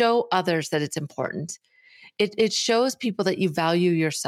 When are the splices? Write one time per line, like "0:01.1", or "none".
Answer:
none